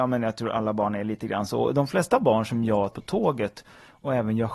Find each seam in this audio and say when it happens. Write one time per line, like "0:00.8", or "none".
0:02.9